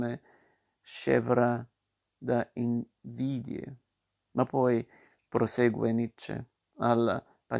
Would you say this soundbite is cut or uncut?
uncut